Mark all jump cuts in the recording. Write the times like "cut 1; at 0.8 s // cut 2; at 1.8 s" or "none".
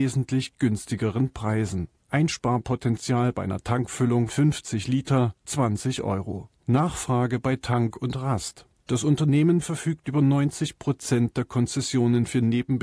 cut 1; at 4.3 s